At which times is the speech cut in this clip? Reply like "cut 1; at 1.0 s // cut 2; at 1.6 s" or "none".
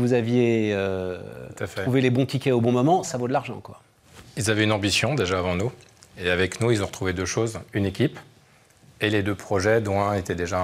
cut 1; at 3.1 s